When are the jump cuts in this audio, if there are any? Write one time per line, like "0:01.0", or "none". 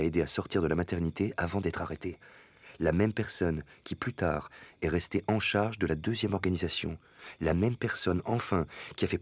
none

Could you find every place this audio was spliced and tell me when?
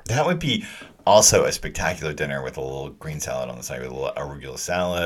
none

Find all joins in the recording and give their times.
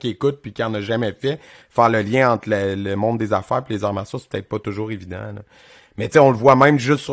none

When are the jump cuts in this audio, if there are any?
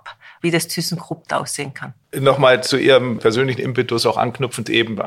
0:01.3
0:02.0
0:03.2

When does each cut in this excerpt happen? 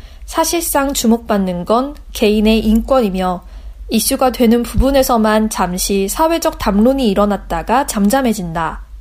none

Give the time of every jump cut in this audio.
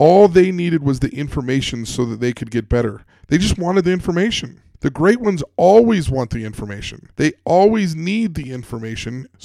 0:04.7
0:07.1

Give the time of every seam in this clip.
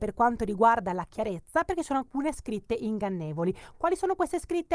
none

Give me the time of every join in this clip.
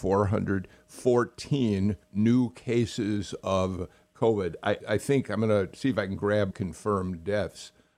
0:02.0
0:04.8
0:06.5

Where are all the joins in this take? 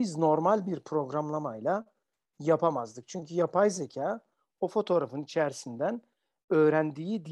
none

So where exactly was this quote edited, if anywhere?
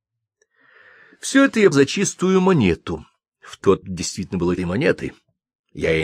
0:01.7
0:03.8
0:04.6

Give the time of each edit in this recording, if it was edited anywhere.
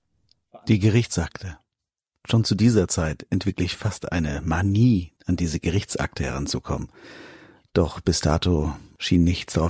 0:05.2

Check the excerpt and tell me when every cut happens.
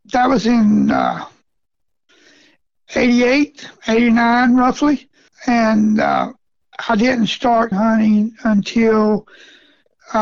0:05.3
0:07.7

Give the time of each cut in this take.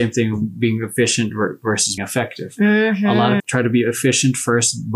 0:02.0
0:03.4

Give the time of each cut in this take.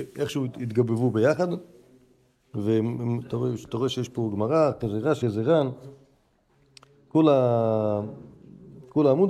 0:05.2

